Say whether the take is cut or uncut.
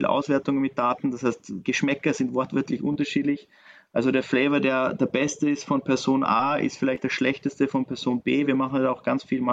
uncut